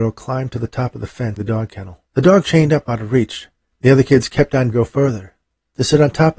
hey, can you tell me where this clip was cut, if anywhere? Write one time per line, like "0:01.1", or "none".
0:01.4
0:02.1
0:02.4
0:03.6
0:04.7